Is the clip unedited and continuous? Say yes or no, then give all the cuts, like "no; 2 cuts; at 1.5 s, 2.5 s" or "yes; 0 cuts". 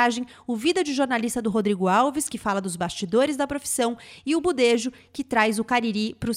yes; 0 cuts